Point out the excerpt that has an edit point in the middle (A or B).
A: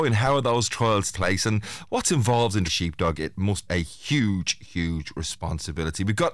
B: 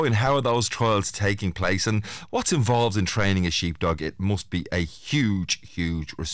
A